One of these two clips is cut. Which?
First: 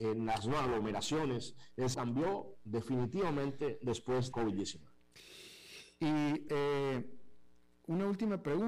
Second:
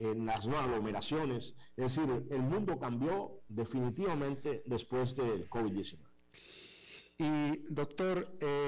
first; 3 cuts; at 1.9 s, 4.3 s, 6.5 s

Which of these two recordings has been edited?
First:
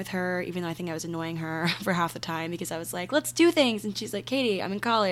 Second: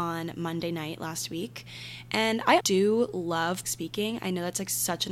second; 2 cuts; at 2.6 s, 3.6 s

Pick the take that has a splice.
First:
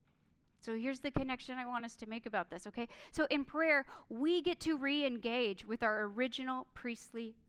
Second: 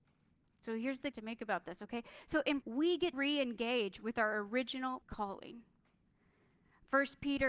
second; 4 cuts; at 1.1 s, 2.6 s, 3.1 s, 5.0 s

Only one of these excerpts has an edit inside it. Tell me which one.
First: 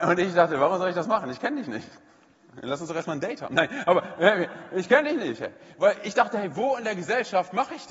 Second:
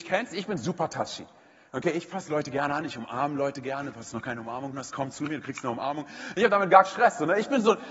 second; 2 cuts; at 4.7 s, 6.8 s

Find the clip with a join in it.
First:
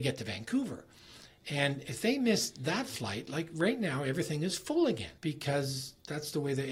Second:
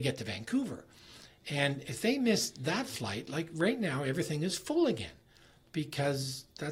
first; 1 cut; at 5.2 s

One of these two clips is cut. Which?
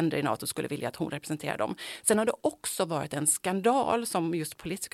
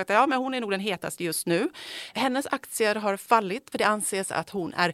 second; 1 cut; at 3.7 s

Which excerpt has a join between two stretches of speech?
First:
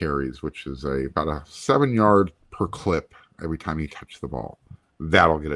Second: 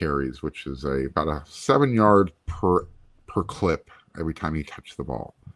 first; 1 cut; at 2.4 s

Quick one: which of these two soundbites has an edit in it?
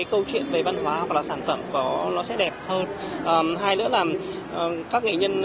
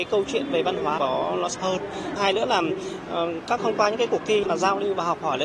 second; 4 cuts; at 1.0 s, 1.5 s, 2.2 s, 3.6 s

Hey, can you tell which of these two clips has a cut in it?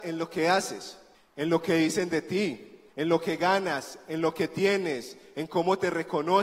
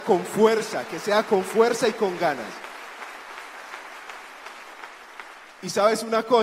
first; 2 cuts; at 1.1 s, 2.9 s

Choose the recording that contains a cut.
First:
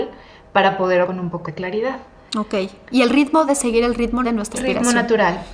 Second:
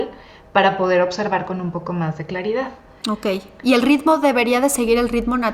first; 5 cuts; at 1.0 s, 1.4 s, 3.5 s, 4.2 s, 4.5 s

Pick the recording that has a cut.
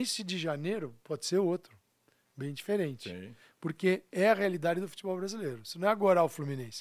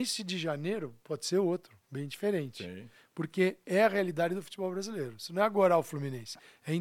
second; 1 cut; at 1.8 s

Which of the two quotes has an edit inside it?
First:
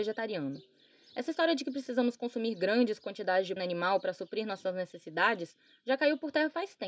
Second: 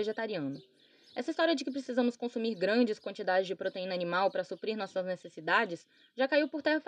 first; 1 cut; at 3.6 s

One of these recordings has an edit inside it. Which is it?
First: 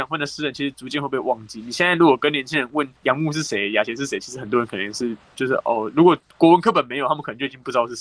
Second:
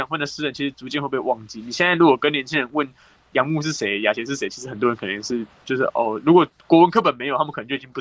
first; 1 cut; at 3.0 s

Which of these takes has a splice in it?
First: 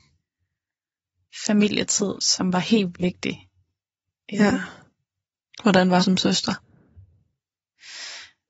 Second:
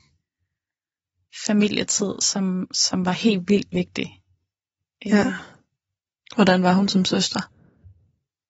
first; 3 cuts; at 2.2 s, 2.9 s, 6.0 s

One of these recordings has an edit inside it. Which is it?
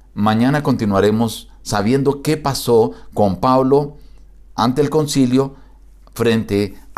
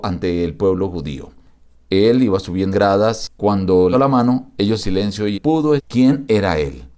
second; 5 cuts; at 2.7 s, 3.9 s, 4.8 s, 5.3 s, 5.8 s

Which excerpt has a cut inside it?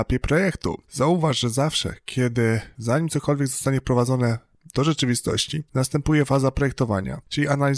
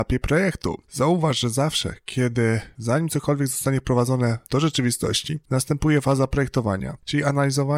second; 1 cut; at 4.4 s

